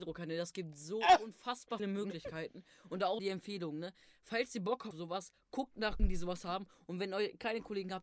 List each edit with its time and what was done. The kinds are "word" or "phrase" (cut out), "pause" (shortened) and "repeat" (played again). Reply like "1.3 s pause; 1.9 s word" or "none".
1.8 s word; 3.2 s word; 4.9 s word; 6.0 s word